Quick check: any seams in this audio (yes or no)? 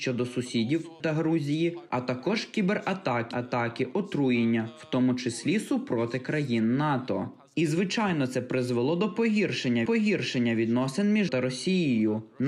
yes